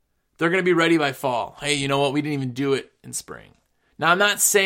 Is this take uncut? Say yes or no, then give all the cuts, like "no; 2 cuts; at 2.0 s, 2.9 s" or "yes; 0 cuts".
yes; 0 cuts